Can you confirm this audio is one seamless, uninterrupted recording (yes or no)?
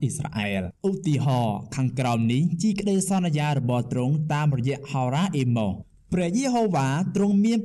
yes